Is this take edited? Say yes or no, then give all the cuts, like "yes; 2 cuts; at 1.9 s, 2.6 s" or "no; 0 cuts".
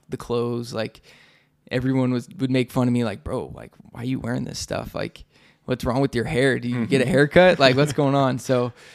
no; 0 cuts